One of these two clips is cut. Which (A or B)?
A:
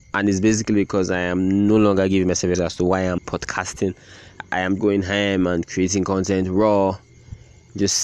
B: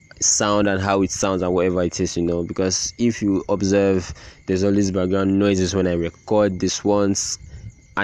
A